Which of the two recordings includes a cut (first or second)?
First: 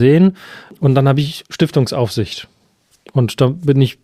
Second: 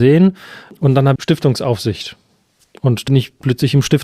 second